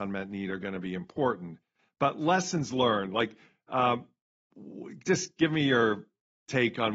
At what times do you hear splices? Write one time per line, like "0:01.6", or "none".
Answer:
none